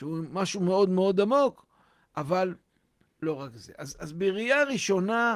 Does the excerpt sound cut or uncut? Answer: uncut